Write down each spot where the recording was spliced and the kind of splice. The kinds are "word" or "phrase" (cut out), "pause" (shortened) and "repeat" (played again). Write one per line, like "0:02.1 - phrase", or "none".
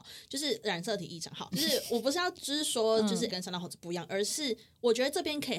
0:01.5 - word
0:03.3 - word